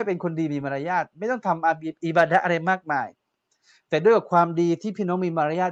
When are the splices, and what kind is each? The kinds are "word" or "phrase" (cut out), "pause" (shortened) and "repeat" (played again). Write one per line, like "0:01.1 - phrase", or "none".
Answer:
none